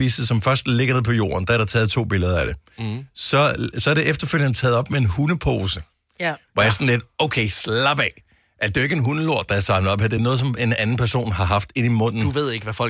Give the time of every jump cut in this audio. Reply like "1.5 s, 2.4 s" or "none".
none

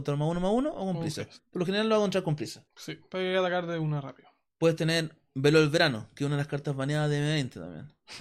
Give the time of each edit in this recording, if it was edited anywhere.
1.4 s, 2.7 s

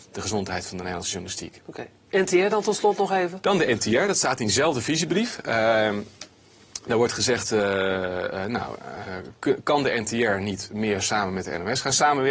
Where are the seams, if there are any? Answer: none

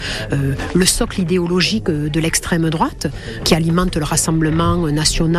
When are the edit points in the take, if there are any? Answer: 3.4 s

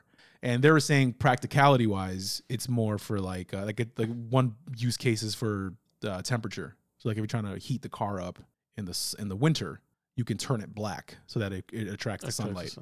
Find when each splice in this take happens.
none

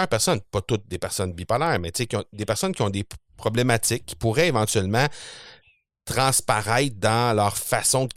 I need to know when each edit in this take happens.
none

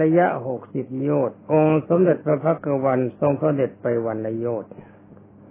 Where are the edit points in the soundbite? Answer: 1.4 s

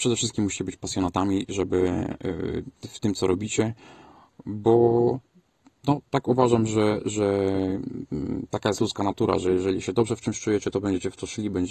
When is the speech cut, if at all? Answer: none

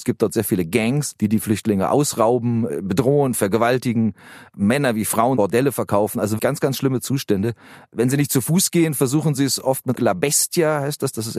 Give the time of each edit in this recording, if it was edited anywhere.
5.4 s, 6.4 s, 9.9 s

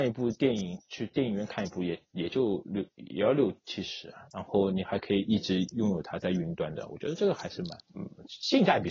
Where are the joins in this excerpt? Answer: 7.8 s

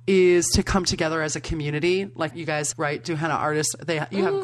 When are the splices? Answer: 2.3 s, 2.7 s

